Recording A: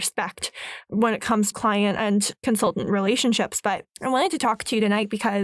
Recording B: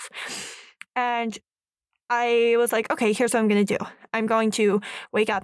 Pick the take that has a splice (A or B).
A